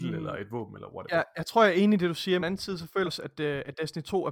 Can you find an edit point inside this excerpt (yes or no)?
yes